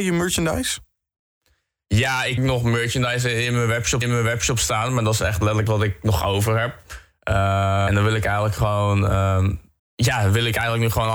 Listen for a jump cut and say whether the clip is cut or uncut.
cut